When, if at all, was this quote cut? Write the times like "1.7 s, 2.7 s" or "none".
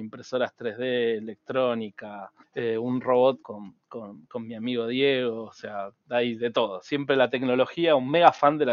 2.4 s, 3.4 s